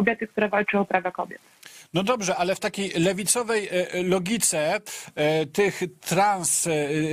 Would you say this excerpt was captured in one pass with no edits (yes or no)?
yes